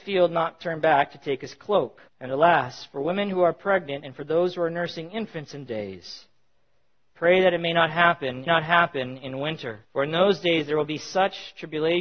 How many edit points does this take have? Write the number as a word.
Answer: four